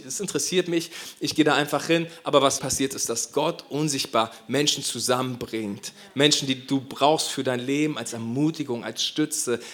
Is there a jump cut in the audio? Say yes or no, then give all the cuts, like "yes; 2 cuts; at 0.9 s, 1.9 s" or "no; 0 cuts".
yes; 1 cut; at 2.6 s